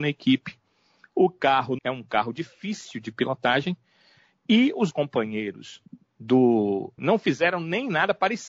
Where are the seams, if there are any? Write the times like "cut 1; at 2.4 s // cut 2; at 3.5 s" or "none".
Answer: cut 1; at 1.8 s // cut 2; at 4.9 s // cut 3; at 7.0 s